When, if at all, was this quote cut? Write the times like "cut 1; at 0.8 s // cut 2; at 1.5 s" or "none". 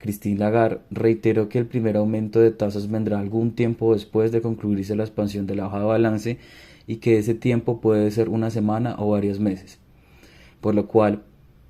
none